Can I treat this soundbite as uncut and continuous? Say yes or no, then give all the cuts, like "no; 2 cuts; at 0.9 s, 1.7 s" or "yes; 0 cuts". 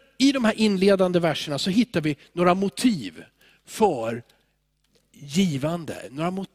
yes; 0 cuts